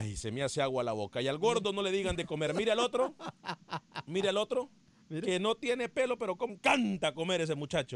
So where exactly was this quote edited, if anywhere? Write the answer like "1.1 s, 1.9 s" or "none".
6.5 s